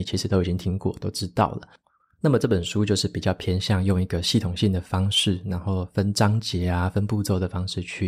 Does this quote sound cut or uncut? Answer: uncut